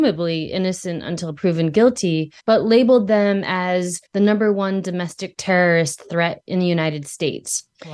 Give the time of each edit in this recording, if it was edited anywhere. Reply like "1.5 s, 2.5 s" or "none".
2.4 s, 4.1 s